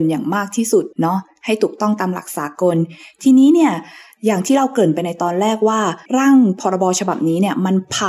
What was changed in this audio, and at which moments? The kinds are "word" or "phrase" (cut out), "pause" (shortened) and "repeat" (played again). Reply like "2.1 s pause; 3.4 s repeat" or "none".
0.9 s pause; 6.1 s pause